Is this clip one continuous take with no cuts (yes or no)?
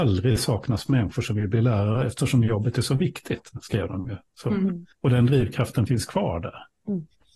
no